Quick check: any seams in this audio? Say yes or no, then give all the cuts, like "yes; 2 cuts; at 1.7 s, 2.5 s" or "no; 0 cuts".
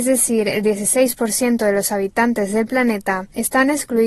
no; 0 cuts